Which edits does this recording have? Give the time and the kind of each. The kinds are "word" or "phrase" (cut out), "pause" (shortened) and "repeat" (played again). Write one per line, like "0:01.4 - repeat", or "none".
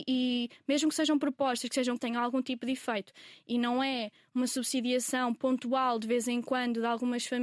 0:02.0 - phrase